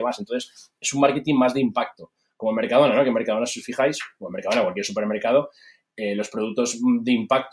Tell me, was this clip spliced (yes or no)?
no